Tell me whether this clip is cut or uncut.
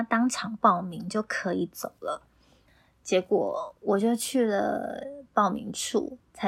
uncut